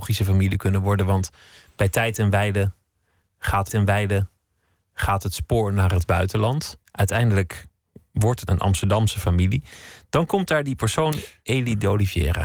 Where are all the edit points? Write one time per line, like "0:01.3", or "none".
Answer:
0:03.7
0:06.8
0:08.5

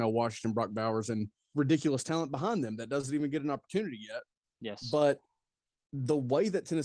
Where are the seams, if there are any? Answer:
0:01.5

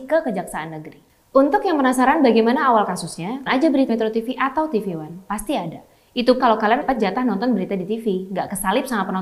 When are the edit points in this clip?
0:03.5
0:03.9
0:06.4
0:06.8

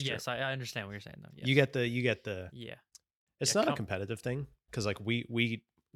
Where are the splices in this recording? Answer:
none

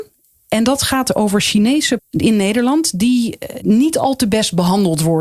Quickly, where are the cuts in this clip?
0:02.0
0:03.6

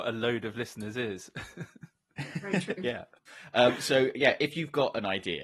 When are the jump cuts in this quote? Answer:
none

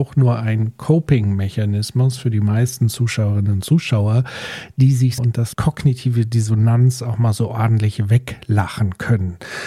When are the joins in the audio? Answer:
0:05.2
0:05.5

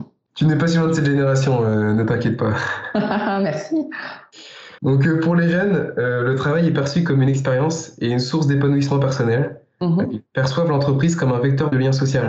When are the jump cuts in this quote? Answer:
0:04.8

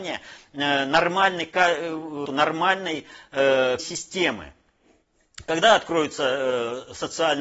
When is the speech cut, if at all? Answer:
0:02.3
0:03.8

